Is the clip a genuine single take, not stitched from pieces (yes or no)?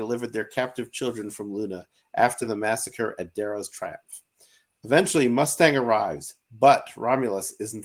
yes